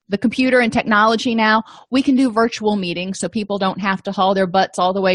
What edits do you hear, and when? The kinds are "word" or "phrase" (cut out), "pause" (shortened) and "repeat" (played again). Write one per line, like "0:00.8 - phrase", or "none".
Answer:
none